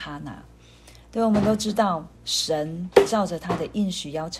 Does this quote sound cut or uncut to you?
cut